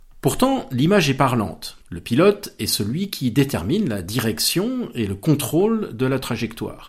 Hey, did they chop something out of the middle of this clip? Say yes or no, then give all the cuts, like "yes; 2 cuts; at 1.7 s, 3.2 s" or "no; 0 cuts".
yes; 1 cut; at 1.8 s